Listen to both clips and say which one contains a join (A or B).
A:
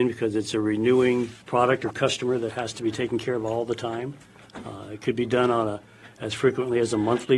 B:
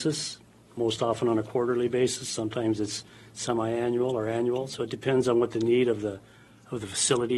A